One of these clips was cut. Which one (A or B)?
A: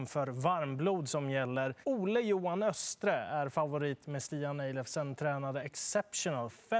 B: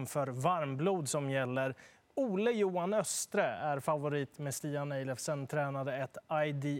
A